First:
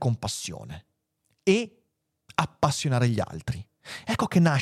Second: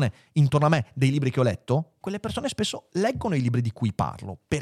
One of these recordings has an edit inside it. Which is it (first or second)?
second